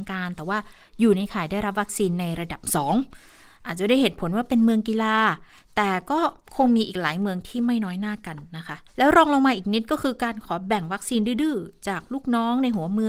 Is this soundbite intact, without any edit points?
no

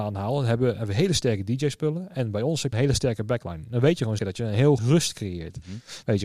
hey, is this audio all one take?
no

